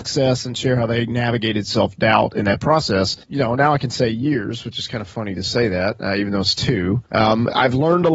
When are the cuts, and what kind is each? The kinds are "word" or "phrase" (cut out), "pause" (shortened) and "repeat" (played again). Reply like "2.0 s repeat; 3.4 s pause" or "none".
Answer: 7.1 s pause